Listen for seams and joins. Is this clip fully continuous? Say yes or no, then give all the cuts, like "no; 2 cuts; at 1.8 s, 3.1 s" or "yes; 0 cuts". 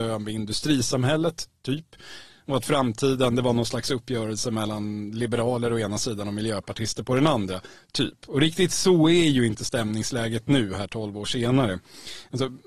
yes; 0 cuts